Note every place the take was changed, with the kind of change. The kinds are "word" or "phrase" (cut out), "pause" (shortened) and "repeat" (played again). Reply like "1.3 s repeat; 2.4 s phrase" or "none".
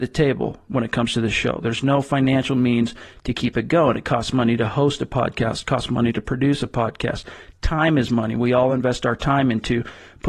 none